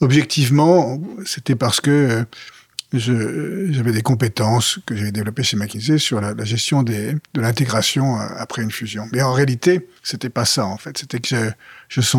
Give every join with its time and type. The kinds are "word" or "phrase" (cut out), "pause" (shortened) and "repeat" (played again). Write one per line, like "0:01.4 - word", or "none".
0:10.0 - pause